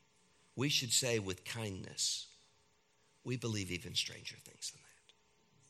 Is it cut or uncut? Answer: cut